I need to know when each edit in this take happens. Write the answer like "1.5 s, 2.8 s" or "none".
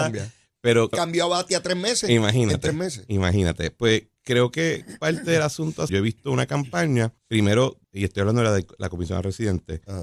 0.9 s, 5.9 s, 7.2 s, 7.8 s